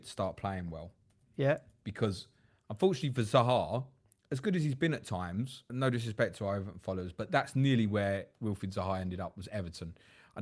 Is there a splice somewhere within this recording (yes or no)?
yes